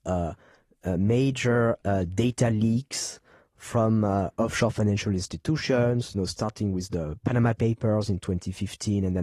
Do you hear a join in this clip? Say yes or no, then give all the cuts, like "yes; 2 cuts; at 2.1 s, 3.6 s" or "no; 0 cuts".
no; 0 cuts